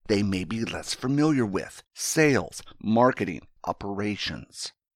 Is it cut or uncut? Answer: cut